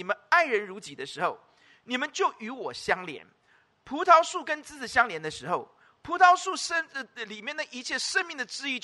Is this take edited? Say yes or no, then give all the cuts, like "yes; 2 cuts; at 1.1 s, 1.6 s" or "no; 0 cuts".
no; 0 cuts